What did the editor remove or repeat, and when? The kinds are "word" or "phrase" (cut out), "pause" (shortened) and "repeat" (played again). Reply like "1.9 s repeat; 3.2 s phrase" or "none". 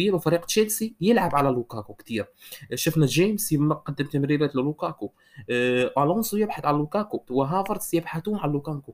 7.3 s word

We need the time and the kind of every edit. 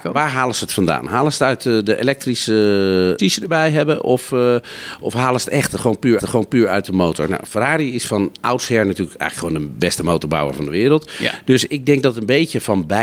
3.2 s phrase; 6.2 s repeat

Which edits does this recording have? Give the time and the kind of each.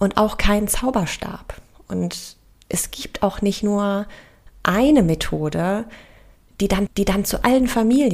6.9 s repeat

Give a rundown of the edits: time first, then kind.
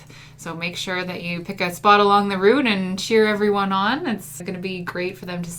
4.4 s word

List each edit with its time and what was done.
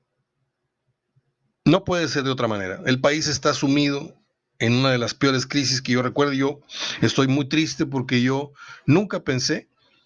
none

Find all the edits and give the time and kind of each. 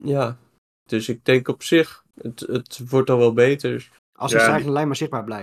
2.1 s pause; 4.0 s pause

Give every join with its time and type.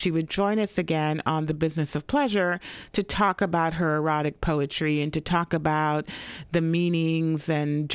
none

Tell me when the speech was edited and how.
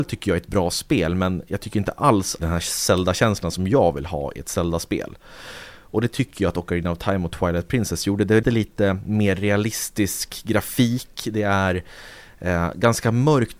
2.4 s phrase; 8.4 s word

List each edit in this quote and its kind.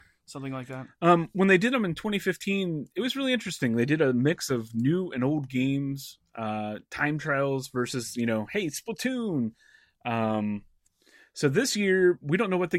none

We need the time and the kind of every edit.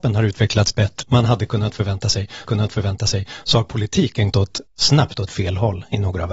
1.0 s word; 2.4 s repeat; 4.3 s word; 4.7 s pause

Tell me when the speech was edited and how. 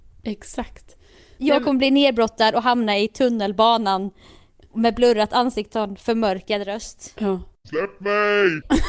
5.7 s word

